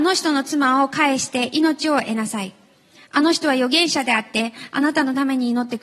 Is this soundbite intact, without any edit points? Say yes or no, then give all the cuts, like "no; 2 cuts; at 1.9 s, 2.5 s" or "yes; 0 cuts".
yes; 0 cuts